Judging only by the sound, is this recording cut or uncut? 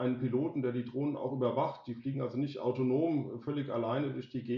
uncut